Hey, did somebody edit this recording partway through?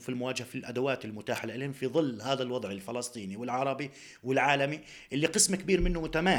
no; 0 cuts

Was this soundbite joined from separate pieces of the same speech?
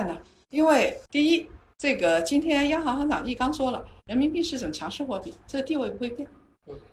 yes; 1 cut; at 1.1 s

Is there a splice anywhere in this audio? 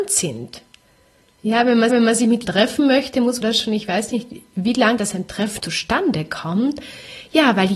yes; 5 cuts; at 1.9 s, 2.4 s, 3.4 s, 5.0 s, 5.6 s

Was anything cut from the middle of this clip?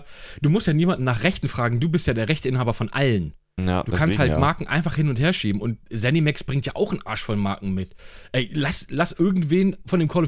yes; 1 cut; at 8.9 s

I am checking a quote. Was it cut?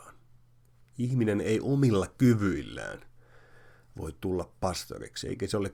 no; 0 cuts

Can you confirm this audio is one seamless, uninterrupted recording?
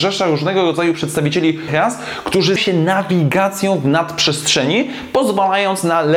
no; 2 cuts; at 1.7 s, 2.6 s

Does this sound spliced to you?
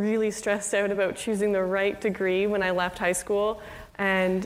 no; 0 cuts

